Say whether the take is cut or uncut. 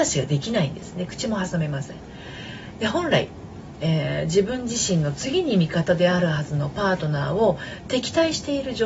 uncut